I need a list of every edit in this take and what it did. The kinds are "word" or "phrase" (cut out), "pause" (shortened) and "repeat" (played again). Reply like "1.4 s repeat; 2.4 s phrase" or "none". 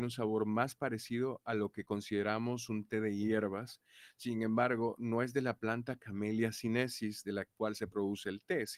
none